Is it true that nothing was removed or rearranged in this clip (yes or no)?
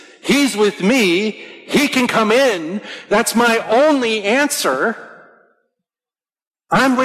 yes